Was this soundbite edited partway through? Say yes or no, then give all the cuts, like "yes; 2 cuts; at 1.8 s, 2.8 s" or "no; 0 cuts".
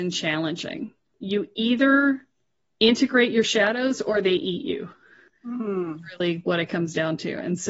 no; 0 cuts